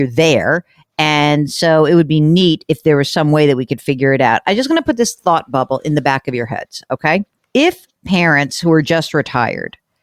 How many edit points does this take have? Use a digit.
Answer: 0